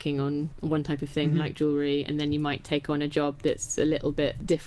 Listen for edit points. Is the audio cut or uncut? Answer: uncut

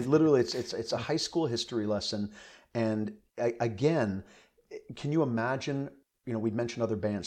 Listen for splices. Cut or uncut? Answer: uncut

